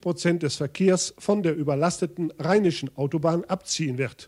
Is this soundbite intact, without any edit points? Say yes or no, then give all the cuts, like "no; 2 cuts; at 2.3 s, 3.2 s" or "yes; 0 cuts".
yes; 0 cuts